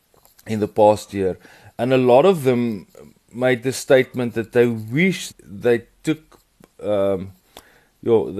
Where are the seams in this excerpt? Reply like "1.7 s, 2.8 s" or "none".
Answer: 5.3 s